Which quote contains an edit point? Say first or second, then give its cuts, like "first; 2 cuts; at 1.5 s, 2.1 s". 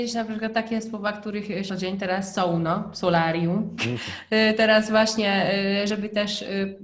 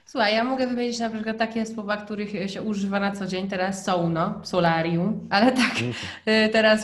first; 2 cuts; at 1.7 s, 3.8 s